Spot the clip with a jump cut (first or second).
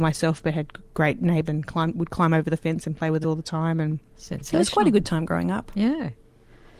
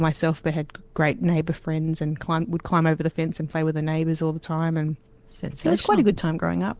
first